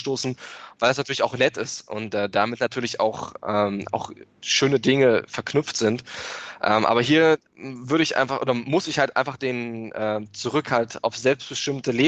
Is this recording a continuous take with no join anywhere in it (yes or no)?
no